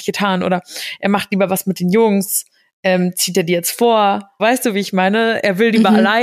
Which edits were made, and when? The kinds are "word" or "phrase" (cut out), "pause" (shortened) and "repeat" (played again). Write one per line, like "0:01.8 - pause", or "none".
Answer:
0:04.4 - word